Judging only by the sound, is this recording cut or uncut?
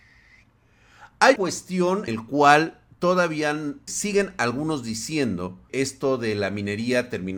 cut